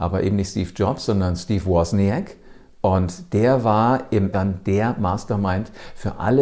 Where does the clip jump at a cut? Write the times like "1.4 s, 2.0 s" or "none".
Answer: 4.3 s